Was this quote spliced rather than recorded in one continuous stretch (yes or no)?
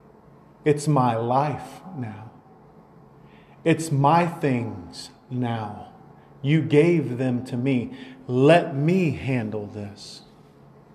no